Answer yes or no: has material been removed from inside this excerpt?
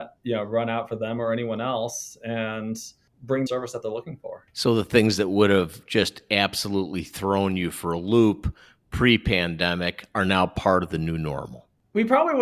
yes